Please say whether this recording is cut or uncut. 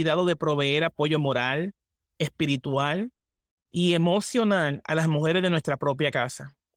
uncut